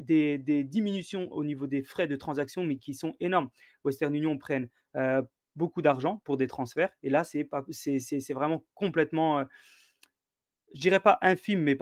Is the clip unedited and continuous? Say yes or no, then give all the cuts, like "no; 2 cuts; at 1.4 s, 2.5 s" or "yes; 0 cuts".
yes; 0 cuts